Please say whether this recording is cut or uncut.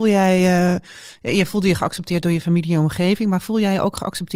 uncut